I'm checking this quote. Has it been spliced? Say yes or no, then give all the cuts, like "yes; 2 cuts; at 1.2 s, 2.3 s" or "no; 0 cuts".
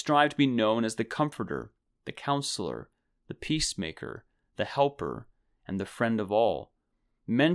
no; 0 cuts